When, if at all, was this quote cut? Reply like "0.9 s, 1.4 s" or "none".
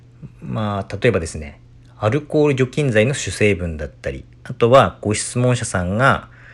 none